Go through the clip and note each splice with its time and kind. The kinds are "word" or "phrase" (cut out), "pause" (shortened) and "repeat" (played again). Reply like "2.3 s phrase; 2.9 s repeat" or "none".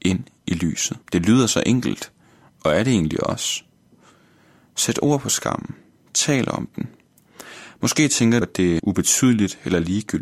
1.0 s pause; 8.4 s word; 8.8 s word